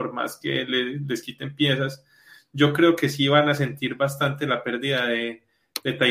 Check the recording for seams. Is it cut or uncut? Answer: uncut